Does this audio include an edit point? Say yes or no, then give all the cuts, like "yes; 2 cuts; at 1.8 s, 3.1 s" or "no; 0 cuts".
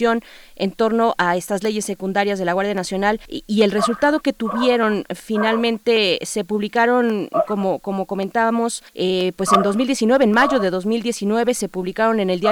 yes; 2 cuts; at 3.3 s, 8.9 s